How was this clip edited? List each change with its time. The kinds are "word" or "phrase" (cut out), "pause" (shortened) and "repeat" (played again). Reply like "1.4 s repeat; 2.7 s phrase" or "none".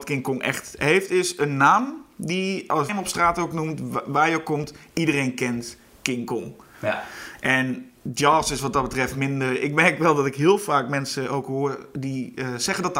2.9 s word